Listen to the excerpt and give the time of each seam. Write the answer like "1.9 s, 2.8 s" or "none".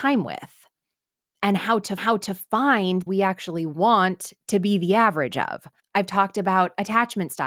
2.0 s, 3.1 s, 5.8 s